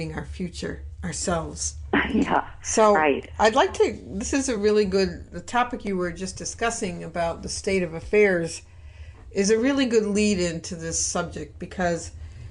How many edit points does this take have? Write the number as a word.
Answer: zero